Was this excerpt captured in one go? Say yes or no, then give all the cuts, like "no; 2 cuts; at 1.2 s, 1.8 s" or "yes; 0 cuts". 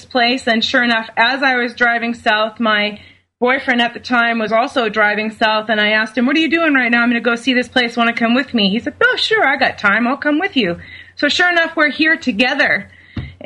yes; 0 cuts